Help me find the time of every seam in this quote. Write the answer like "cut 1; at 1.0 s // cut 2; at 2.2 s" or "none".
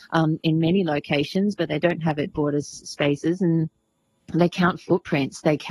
cut 1; at 2.3 s